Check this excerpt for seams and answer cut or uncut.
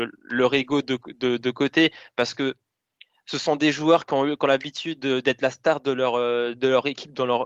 uncut